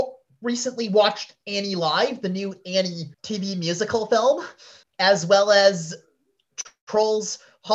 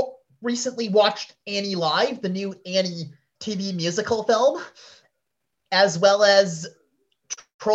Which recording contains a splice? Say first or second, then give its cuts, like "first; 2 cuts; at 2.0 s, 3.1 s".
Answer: first; 2 cuts; at 3.1 s, 4.8 s